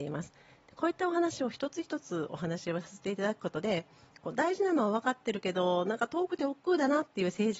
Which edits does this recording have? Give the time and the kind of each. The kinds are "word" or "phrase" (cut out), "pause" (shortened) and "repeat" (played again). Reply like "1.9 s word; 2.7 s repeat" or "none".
none